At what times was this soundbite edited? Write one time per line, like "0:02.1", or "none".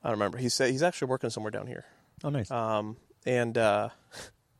none